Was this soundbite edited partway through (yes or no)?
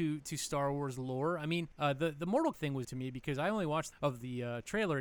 yes